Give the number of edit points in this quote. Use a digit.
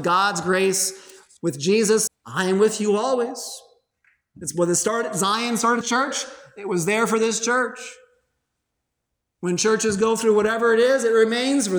2